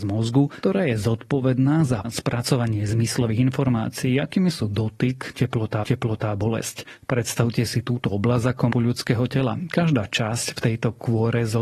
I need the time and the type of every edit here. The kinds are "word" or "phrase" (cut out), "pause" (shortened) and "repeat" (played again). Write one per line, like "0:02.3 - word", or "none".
0:02.0 - word
0:05.8 - repeat
0:08.7 - word